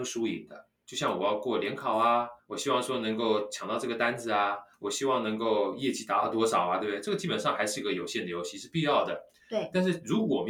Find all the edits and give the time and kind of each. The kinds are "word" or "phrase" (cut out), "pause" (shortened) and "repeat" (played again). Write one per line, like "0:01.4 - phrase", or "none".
0:02.4 - pause
0:04.7 - pause